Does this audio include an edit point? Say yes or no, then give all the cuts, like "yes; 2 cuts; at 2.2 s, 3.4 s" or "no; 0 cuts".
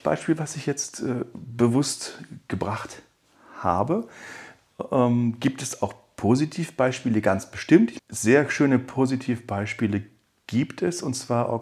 no; 0 cuts